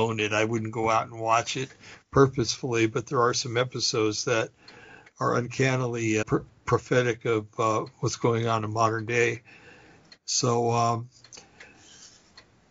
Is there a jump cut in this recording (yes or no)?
yes